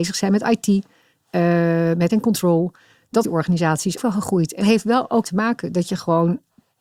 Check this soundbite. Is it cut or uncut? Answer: cut